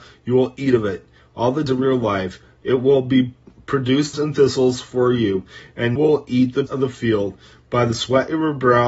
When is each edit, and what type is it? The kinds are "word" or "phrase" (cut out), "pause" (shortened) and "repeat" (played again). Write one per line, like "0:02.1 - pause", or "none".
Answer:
0:01.7 - word
0:04.1 - word
0:06.0 - word
0:06.7 - word

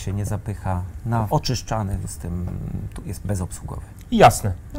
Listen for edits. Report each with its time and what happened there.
0:01.3 - phrase
0:02.0 - word

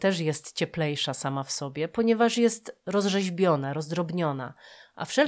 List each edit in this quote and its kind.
none

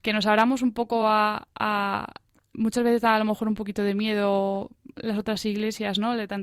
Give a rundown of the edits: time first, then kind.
none

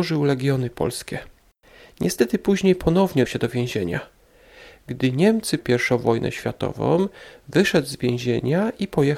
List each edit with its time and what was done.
0:03.2 - word
0:05.6 - word

